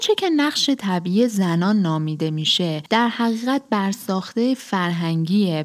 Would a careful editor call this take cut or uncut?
uncut